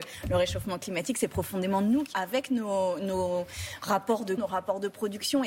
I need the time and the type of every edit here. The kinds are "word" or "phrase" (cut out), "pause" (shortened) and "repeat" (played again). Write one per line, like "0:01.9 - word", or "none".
0:02.1 - phrase
0:04.4 - word